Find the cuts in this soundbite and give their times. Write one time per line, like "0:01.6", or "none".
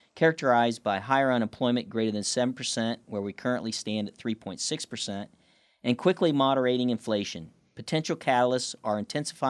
none